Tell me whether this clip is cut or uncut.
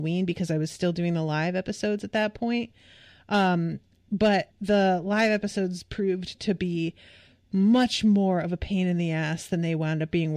cut